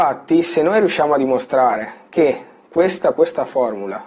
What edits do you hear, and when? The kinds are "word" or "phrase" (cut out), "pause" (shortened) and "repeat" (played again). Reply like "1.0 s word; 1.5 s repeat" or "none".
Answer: 3.1 s word